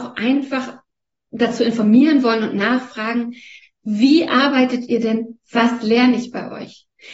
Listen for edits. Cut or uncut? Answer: uncut